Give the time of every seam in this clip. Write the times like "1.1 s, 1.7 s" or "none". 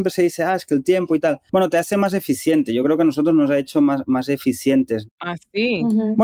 none